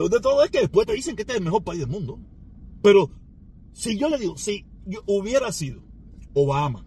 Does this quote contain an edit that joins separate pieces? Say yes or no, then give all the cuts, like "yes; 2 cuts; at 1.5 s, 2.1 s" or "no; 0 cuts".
no; 0 cuts